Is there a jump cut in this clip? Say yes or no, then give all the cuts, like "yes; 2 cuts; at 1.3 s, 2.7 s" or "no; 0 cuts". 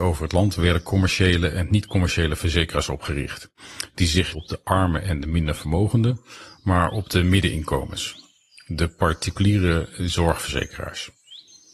yes; 1 cut; at 4.3 s